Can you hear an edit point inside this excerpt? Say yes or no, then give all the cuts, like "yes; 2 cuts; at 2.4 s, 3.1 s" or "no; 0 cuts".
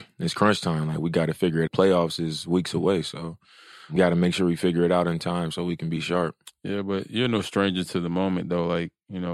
yes; 2 cuts; at 1.7 s, 4.0 s